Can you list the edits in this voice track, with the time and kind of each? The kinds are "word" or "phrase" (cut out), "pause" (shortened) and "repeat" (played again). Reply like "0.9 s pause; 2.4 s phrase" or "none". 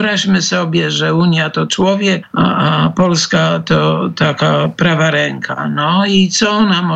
1.7 s word; 2.2 s word